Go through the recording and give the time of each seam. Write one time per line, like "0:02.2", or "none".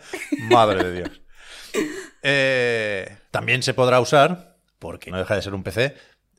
0:03.3
0:05.1